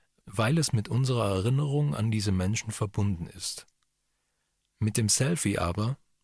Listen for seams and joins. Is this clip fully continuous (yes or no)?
yes